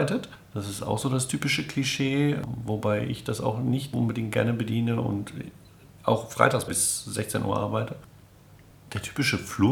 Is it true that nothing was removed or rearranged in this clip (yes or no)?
no